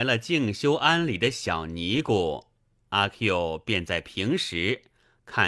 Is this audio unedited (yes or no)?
yes